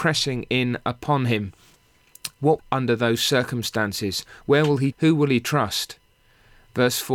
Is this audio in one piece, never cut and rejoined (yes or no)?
no